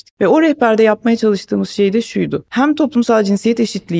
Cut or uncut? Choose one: uncut